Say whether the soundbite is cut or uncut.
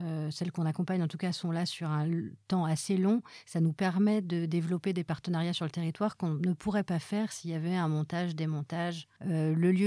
uncut